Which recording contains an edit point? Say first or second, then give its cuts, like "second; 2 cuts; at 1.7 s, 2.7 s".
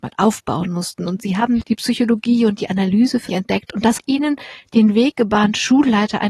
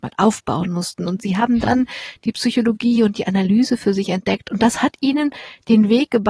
first; 3 cuts; at 1.6 s, 3.3 s, 4.0 s